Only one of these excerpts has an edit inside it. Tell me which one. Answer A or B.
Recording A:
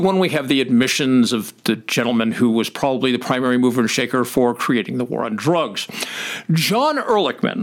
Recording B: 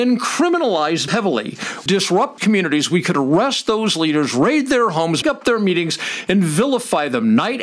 B